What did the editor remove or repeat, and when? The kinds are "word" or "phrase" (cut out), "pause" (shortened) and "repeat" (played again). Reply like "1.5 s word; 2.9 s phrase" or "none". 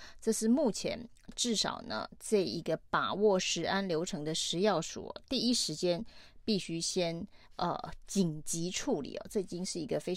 7.4 s pause